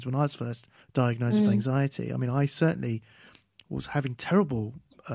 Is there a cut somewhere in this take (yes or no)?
no